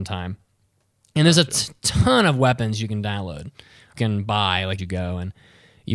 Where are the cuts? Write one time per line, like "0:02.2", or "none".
0:04.0
0:04.8

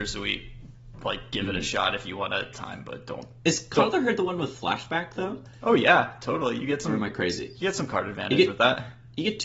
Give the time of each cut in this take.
0:02.5

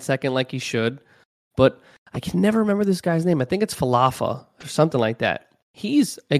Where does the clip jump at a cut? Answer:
none

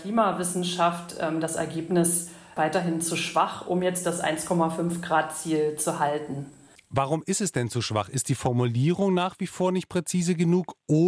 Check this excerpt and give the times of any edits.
none

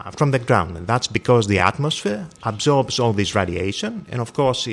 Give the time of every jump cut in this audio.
none

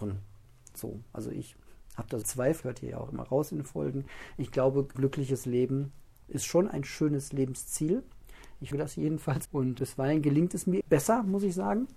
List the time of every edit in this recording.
0:02.2
0:02.6
0:04.9
0:06.2
0:08.7
0:09.5
0:09.8
0:10.8

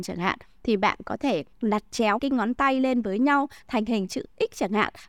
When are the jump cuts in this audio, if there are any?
0:01.5
0:02.2

